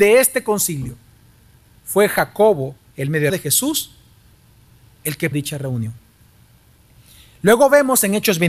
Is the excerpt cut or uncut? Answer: cut